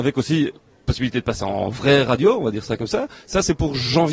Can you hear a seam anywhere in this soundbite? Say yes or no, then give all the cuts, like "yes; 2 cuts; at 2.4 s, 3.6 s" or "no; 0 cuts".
no; 0 cuts